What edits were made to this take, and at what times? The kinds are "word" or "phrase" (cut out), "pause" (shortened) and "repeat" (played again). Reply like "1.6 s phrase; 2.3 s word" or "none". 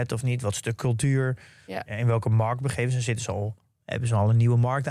none